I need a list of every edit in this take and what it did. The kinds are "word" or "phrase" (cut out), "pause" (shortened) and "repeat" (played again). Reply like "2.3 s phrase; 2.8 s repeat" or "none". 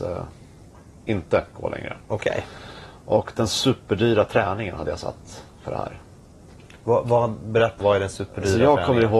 7.8 s word